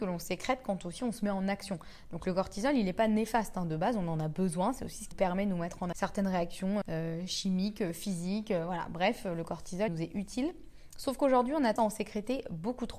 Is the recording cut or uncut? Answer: cut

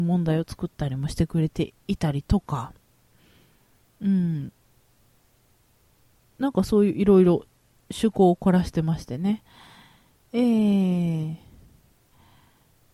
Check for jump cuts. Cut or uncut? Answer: uncut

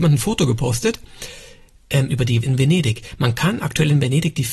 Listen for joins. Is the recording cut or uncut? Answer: cut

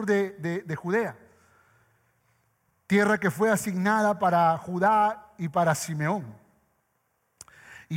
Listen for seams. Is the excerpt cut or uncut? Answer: uncut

